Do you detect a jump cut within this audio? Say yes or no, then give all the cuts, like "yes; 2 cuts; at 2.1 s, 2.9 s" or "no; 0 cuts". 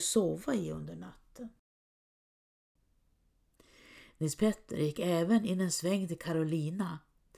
no; 0 cuts